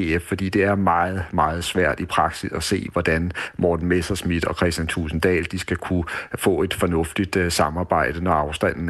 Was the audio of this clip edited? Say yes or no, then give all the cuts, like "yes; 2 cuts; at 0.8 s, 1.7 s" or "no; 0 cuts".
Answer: no; 0 cuts